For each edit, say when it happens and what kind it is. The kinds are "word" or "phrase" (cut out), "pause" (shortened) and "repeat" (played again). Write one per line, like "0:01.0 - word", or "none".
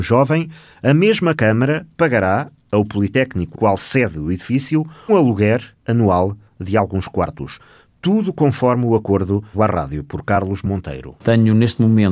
0:03.5 - word
0:05.1 - word
0:09.5 - word